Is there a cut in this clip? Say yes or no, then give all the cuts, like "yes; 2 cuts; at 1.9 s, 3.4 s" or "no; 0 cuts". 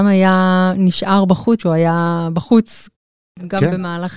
yes; 1 cut; at 1.6 s